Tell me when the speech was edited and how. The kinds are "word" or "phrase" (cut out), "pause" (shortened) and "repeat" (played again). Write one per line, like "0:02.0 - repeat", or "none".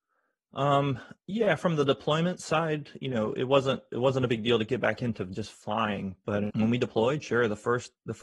0:06.5 - word

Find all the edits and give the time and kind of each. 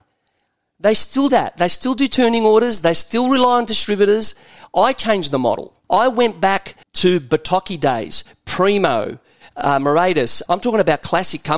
0:01.3 - word
0:05.8 - pause
0:06.8 - pause
0:10.5 - word

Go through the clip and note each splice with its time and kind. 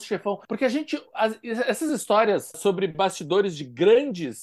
none

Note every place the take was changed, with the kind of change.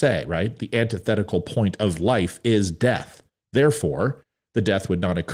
none

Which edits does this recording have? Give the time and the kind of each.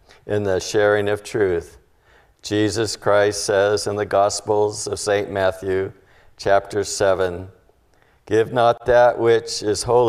none

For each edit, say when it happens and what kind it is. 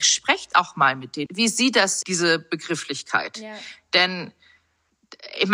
0:01.3 - phrase
0:02.0 - word

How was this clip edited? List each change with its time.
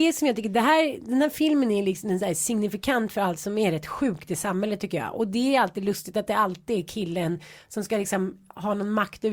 none

